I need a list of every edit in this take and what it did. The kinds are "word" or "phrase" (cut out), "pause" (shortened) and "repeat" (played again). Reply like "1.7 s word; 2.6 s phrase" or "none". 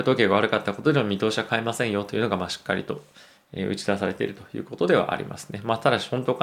none